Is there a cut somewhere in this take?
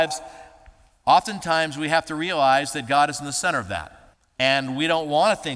yes; 1 cut; at 4.1 s

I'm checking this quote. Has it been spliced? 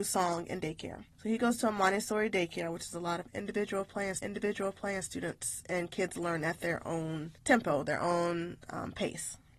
yes; 3 cuts; at 1.1 s, 4.2 s, 7.4 s

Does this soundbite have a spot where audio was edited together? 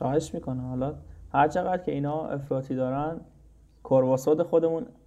no; 0 cuts

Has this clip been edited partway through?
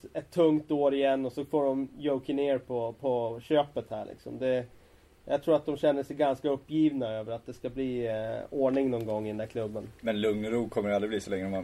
no; 0 cuts

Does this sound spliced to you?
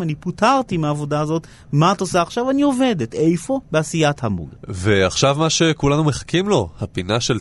yes; 1 cut; at 3.6 s

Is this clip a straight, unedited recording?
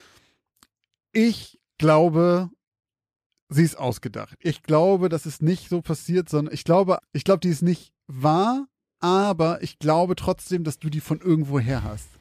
no; 1 cut; at 7.0 s

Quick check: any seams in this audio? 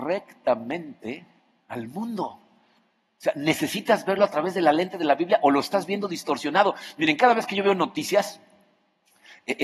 no; 0 cuts

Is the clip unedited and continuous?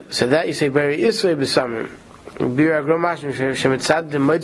yes; 0 cuts

